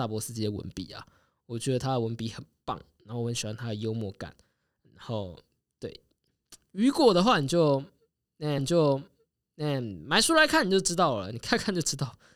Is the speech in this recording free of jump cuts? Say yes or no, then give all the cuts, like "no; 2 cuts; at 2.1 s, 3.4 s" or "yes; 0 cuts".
no; 1 cut; at 8.6 s